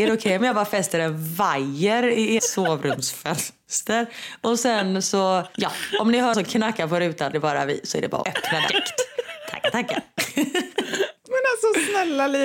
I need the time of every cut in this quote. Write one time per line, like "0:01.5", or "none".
0:02.4
0:06.3
0:07.3
0:08.2
0:08.7